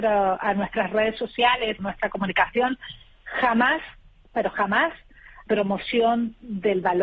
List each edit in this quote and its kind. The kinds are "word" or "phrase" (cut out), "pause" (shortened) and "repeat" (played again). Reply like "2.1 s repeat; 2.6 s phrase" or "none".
1.8 s word; 5.5 s word